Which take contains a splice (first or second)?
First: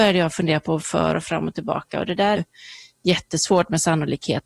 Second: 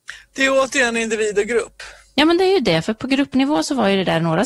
first